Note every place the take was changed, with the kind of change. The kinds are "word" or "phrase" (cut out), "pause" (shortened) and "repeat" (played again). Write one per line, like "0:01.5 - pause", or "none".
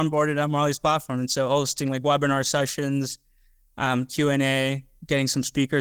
none